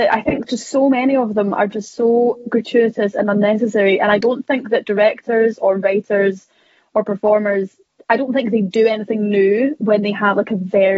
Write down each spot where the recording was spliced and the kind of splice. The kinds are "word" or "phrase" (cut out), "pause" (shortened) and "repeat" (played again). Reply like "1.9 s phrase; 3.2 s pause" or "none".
none

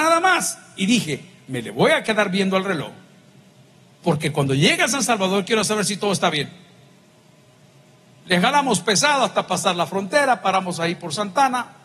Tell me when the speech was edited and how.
none

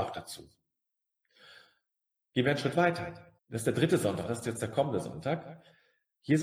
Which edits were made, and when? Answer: 3.4 s pause

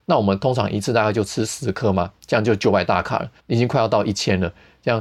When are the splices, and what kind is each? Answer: 3.4 s pause

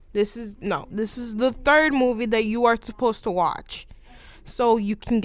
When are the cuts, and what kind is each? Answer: none

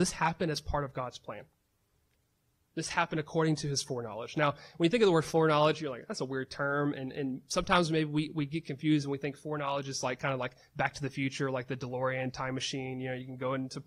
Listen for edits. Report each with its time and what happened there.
none

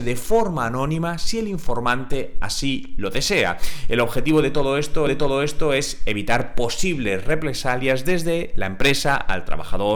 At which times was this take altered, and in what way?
5.1 s repeat

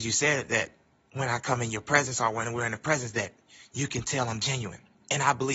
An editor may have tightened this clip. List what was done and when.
none

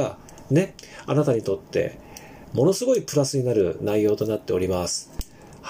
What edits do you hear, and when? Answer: none

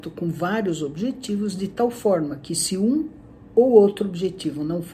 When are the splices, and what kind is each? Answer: none

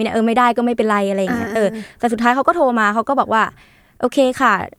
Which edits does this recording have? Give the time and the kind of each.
none

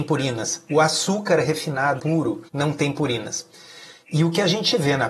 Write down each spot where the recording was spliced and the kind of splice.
2.0 s word; 2.5 s pause

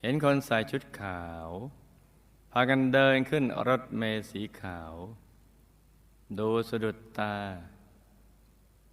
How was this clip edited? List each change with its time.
none

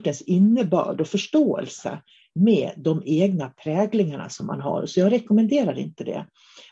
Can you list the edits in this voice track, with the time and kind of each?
none

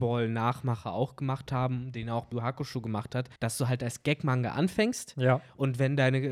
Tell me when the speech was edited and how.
2.3 s word; 3.4 s pause

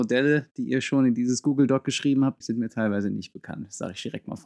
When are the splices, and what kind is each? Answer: 2.4 s word

